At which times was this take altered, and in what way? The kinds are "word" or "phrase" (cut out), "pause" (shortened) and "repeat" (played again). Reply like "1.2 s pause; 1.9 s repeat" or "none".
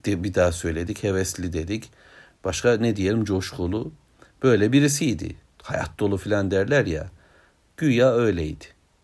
none